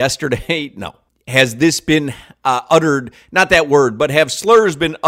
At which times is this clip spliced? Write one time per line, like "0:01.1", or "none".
none